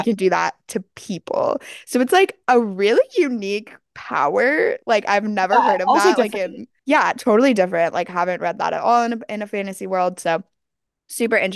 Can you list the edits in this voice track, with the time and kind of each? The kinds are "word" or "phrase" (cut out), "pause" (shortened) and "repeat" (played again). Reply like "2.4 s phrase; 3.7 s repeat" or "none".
6.8 s pause